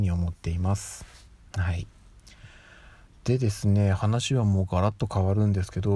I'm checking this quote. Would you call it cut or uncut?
uncut